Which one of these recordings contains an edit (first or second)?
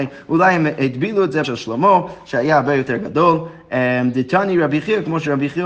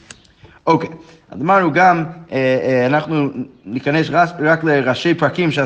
first